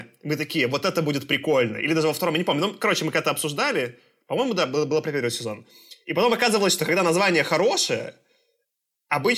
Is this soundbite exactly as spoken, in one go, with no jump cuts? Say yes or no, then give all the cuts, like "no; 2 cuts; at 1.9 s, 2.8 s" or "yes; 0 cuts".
yes; 0 cuts